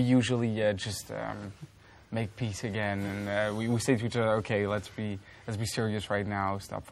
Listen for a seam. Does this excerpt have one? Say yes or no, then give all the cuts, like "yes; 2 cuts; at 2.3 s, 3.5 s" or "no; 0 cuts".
no; 0 cuts